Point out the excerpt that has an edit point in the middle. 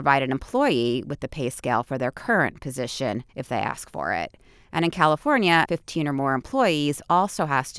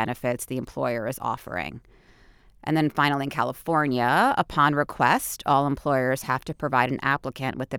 first; 2 cuts; at 3.3 s, 5.6 s

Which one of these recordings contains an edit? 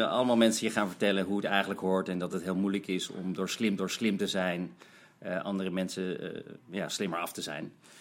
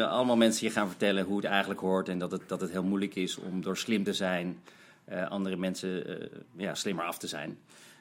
first; 2 cuts; at 2.3 s, 3.8 s

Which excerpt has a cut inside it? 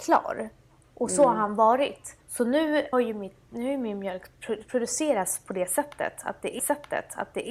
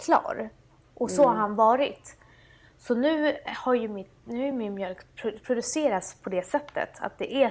first; 3 cuts; at 2.2 s, 2.9 s, 6.6 s

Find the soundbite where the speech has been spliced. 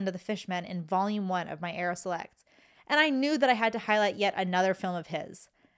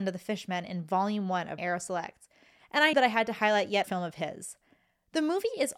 second; 3 cuts; at 1.6 s, 2.9 s, 3.8 s

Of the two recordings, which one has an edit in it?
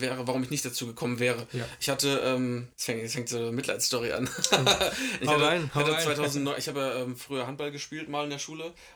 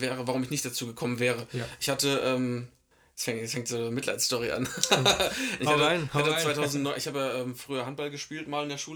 first; 1 cut; at 2.7 s

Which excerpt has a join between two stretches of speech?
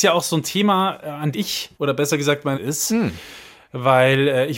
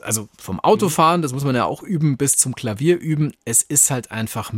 first; 3 cuts; at 1.3 s, 1.7 s, 2.5 s

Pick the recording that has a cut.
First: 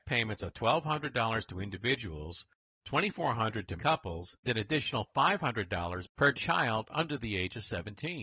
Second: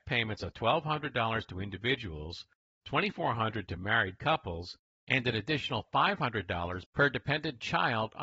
first; 3 cuts; at 3.8 s, 4.4 s, 6.3 s

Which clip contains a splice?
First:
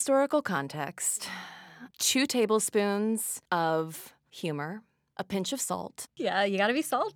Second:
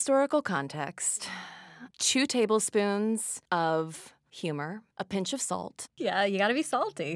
second; 1 cut; at 4.9 s

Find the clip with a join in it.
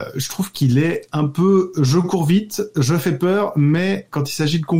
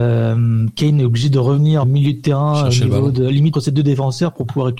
second; 2 cuts; at 1.8 s, 3.5 s

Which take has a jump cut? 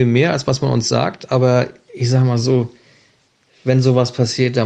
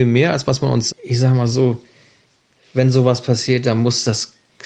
second; 1 cut; at 0.9 s

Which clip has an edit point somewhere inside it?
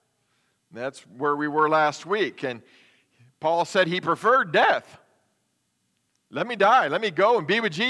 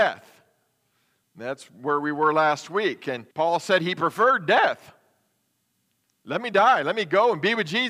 second; 1 cut; at 3.3 s

